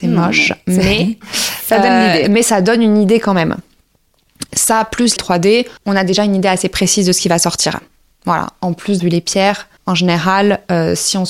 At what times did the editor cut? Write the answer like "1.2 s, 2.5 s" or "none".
5.2 s, 5.8 s, 9.0 s, 9.8 s